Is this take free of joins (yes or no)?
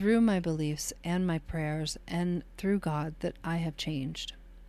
yes